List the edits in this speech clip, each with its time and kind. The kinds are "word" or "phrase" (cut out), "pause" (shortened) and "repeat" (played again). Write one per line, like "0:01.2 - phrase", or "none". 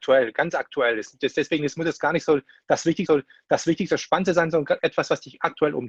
0:03.1 - repeat